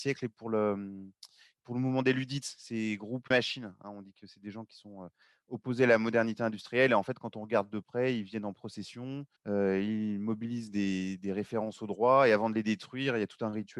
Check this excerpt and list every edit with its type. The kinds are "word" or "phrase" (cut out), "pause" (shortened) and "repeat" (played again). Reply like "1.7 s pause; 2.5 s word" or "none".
3.3 s phrase; 9.4 s pause